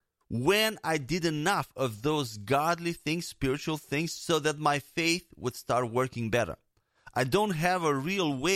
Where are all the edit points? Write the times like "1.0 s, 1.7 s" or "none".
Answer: none